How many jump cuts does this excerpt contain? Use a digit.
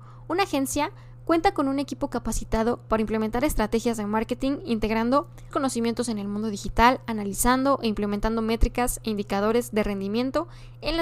1